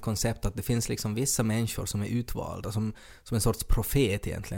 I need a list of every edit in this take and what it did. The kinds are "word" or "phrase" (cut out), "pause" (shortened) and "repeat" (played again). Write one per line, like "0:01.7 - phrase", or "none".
none